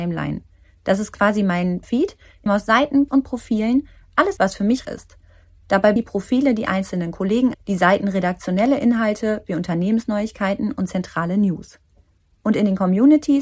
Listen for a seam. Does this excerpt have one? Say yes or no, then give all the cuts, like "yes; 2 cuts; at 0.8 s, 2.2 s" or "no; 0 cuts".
yes; 7 cuts; at 1.8 s, 2.5 s, 3.1 s, 4.4 s, 4.8 s, 6.0 s, 7.5 s